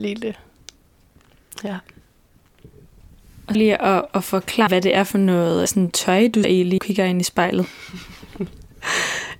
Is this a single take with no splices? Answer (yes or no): no